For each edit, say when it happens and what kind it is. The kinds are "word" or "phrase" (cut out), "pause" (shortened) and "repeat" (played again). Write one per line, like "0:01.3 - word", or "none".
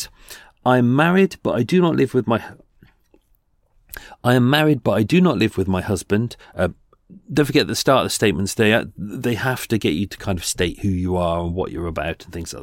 none